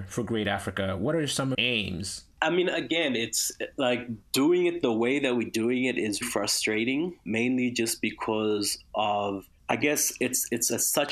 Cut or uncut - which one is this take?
cut